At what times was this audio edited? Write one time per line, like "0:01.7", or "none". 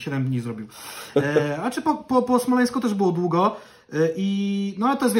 none

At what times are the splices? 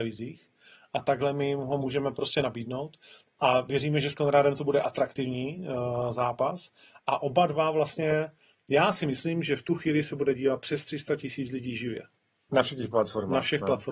none

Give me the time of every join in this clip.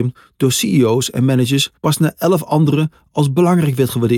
0:01.8

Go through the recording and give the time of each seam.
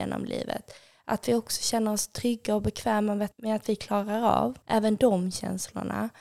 0:03.3
0:04.6

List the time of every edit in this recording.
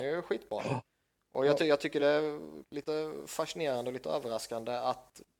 none

